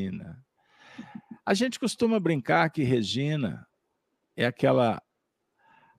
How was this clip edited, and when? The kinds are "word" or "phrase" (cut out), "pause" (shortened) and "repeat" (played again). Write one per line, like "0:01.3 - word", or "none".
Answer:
none